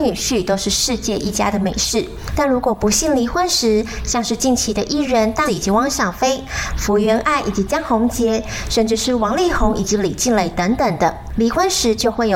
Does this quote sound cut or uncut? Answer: cut